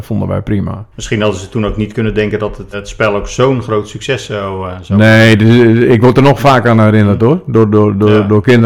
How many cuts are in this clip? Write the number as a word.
two